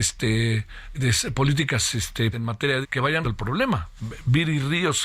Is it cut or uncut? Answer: cut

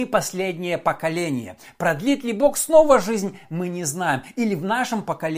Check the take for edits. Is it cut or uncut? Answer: uncut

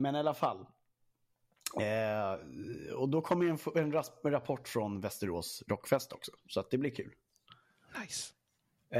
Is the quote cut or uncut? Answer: uncut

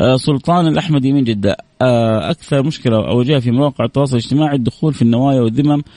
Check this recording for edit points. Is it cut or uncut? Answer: uncut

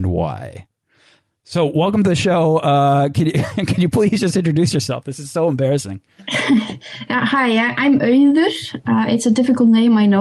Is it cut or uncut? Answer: uncut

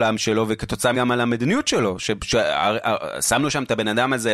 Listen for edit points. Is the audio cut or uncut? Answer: cut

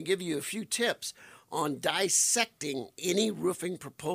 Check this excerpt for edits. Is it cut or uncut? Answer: uncut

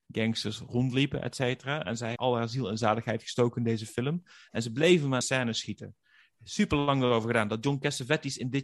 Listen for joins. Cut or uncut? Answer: cut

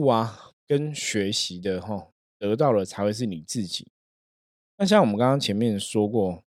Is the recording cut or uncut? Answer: uncut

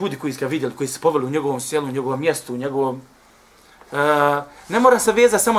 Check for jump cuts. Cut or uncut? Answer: uncut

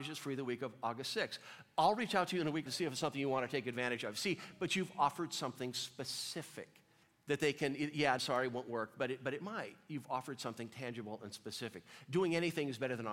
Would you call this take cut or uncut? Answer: cut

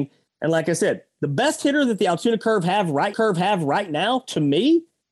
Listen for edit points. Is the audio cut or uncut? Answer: cut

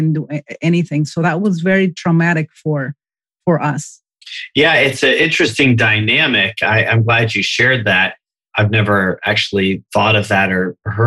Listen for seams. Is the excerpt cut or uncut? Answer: uncut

